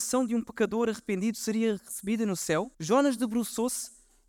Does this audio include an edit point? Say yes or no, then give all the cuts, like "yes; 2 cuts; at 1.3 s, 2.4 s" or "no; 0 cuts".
yes; 1 cut; at 2.7 s